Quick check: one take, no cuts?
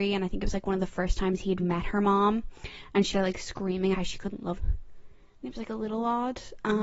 no; 4 cuts; at 1.6 s, 3.1 s, 3.9 s, 4.6 s

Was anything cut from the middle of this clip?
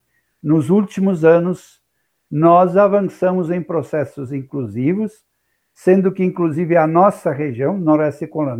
no; 0 cuts

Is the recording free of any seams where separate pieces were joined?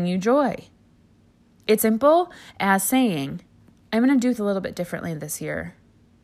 no; 3 cuts; at 1.8 s, 3.6 s, 4.4 s

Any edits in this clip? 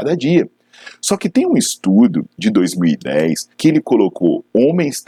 yes; 1 cut; at 3.5 s

